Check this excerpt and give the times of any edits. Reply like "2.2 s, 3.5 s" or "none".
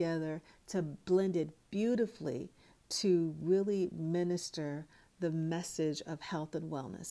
none